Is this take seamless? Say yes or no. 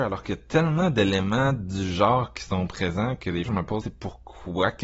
no